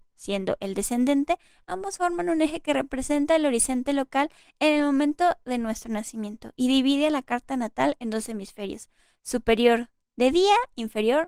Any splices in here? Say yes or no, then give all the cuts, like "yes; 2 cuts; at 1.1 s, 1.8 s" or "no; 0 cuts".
no; 0 cuts